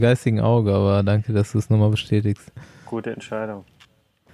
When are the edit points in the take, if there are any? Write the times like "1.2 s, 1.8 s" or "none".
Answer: none